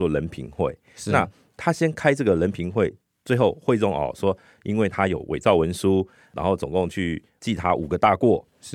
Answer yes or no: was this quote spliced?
no